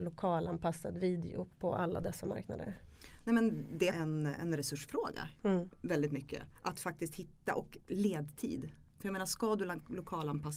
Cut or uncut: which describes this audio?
cut